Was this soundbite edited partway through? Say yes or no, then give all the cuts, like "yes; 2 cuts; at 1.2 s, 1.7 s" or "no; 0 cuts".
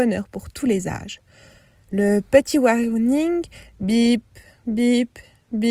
no; 0 cuts